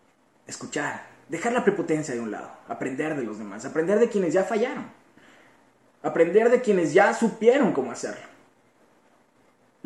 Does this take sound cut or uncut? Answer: uncut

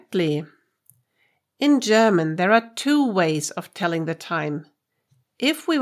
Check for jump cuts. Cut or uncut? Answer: uncut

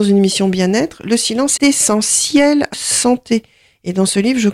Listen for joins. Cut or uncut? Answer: cut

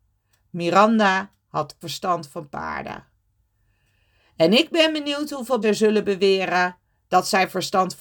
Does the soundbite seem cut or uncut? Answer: cut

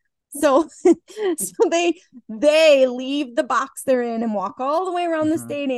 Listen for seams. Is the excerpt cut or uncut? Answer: uncut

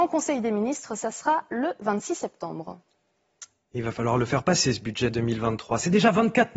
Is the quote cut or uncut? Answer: uncut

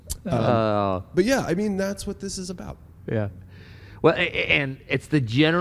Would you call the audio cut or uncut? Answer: uncut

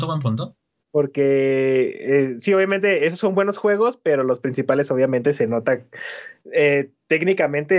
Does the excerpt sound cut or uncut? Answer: uncut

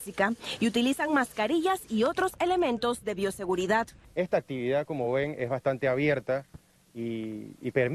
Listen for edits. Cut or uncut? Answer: uncut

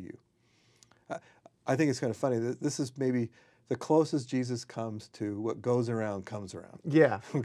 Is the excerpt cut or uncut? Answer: uncut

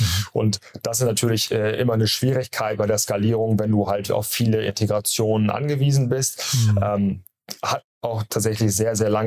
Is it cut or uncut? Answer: uncut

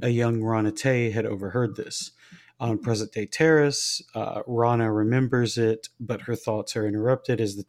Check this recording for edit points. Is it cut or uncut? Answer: uncut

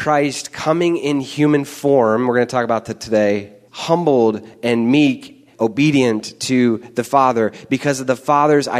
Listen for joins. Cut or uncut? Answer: cut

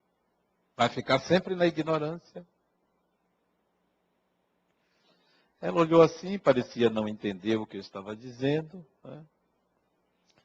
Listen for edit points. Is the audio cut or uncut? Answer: uncut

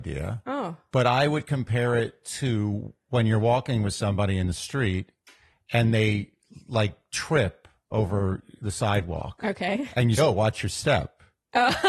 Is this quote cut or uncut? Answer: cut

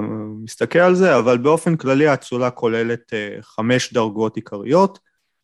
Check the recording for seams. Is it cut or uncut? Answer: uncut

